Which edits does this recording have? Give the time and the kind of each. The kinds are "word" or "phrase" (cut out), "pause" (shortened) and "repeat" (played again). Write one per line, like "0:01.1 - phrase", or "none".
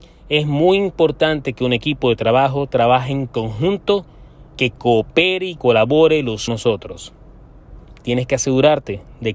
0:04.5 - pause
0:05.6 - word
0:06.5 - phrase